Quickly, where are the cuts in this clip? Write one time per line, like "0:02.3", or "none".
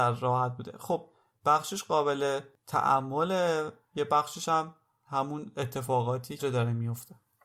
0:06.4